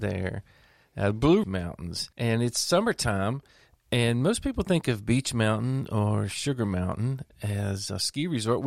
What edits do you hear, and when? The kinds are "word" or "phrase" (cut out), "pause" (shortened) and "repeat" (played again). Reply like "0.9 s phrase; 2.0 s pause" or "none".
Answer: 1.4 s word; 2.1 s pause